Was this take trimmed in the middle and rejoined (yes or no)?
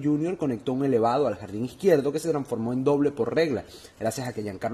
no